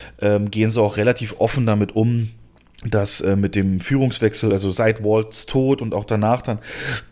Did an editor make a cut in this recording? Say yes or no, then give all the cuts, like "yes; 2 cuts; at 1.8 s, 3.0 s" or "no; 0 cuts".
no; 0 cuts